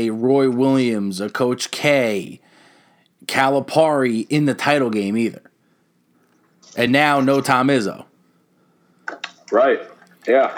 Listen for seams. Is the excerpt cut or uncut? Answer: uncut